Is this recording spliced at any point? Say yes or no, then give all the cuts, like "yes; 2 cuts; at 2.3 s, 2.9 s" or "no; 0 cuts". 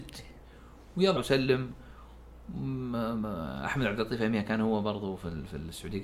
yes; 1 cut; at 1.2 s